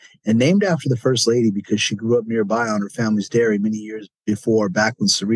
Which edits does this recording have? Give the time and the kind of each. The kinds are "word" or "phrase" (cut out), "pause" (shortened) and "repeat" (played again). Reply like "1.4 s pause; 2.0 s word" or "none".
4.1 s pause